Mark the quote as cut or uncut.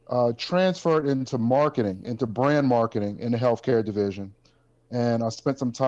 uncut